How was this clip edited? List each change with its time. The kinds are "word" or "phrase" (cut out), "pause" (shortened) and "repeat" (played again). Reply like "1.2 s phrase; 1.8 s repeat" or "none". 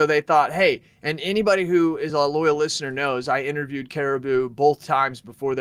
none